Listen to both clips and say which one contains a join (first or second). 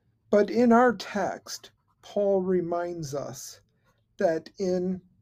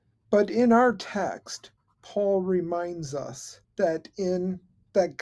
second